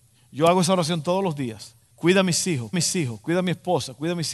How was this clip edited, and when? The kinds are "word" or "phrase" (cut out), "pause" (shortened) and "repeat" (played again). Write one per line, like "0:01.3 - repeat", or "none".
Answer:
0:01.9 - pause
0:02.7 - repeat